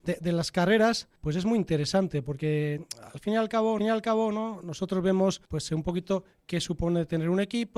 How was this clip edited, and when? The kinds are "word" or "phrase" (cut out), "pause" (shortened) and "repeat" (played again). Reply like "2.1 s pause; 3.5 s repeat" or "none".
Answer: 1.2 s pause; 3.8 s repeat; 5.5 s pause